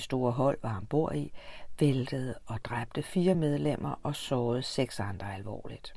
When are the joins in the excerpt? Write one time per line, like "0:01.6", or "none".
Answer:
none